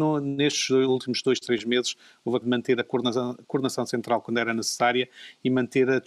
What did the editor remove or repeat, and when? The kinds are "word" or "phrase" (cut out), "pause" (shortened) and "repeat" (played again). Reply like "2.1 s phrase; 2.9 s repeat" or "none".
2.4 s word